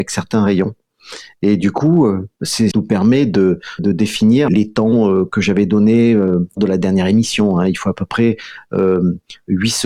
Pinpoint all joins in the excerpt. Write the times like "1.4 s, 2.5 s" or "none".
2.7 s, 3.8 s, 4.5 s, 6.6 s